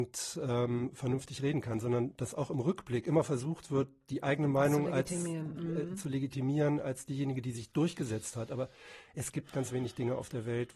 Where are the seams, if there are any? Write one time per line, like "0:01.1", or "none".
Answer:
0:09.5